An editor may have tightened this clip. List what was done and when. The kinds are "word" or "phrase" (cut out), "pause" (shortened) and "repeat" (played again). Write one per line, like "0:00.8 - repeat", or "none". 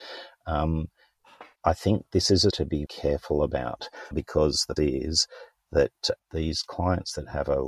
0:01.6 - word
0:02.5 - word
0:02.9 - word
0:04.1 - word
0:04.8 - word
0:06.2 - word